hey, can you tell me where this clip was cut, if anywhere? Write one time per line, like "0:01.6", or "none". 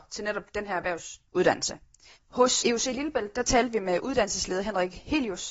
0:02.6